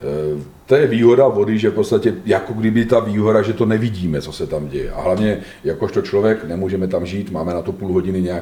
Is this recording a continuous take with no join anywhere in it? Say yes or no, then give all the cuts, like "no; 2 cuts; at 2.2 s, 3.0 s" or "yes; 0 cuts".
yes; 0 cuts